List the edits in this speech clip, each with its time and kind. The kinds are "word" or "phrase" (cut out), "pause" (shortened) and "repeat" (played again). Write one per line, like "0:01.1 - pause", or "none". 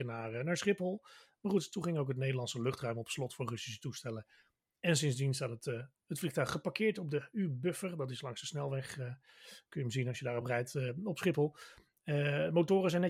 none